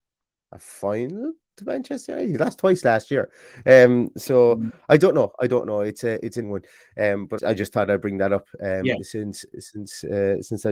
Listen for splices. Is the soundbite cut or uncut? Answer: cut